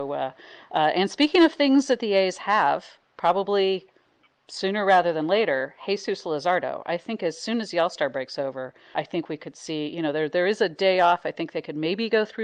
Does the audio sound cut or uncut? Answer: cut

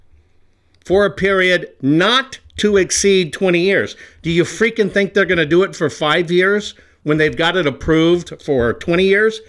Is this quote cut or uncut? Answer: uncut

